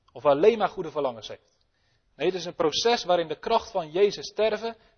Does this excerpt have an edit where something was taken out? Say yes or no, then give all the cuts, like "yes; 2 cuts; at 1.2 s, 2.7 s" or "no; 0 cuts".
no; 0 cuts